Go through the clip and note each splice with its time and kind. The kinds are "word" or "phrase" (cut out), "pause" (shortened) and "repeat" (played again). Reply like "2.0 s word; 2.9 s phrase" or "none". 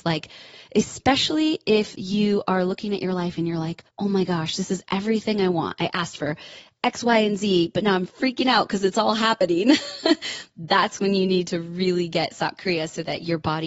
3.9 s pause